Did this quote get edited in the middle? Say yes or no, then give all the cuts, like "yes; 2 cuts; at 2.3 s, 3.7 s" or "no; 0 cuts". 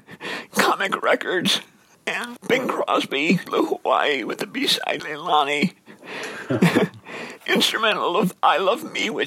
yes; 3 cuts; at 3.5 s, 5.0 s, 7.4 s